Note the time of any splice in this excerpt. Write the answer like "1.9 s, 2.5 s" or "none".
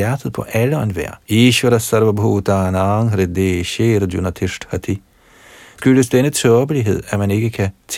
1.2 s, 5.8 s